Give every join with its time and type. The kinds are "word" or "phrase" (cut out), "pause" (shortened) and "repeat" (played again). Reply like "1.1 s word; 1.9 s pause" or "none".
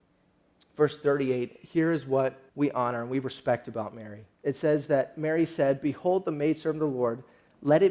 2.5 s pause; 4.3 s pause